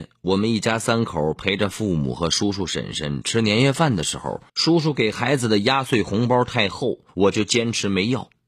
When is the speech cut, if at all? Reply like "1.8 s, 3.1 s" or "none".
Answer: 4.5 s, 7.1 s